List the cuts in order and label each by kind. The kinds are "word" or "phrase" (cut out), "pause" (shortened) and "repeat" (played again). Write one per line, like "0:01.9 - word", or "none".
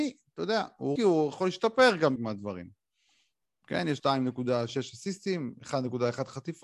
0:01.0 - word
0:02.2 - word
0:04.0 - word